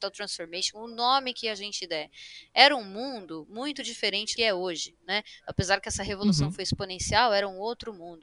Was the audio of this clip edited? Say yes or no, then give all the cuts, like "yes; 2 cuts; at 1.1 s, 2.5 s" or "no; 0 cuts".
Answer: yes; 1 cut; at 4.4 s